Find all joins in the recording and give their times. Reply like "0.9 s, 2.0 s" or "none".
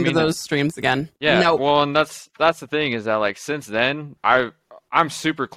1.1 s, 4.2 s